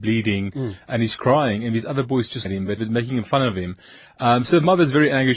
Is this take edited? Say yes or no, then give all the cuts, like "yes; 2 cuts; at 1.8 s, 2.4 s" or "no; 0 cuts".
yes; 2 cuts; at 2.4 s, 2.8 s